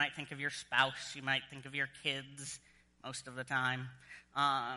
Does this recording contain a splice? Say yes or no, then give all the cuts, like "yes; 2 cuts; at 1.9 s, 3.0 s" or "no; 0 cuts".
no; 0 cuts